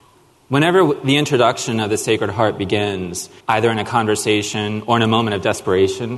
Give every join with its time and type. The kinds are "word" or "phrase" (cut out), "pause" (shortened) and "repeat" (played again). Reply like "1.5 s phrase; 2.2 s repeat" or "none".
3.4 s pause